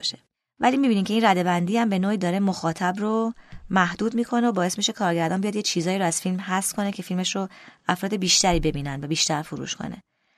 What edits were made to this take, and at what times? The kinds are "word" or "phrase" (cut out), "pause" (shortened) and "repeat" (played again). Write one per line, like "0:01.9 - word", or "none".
none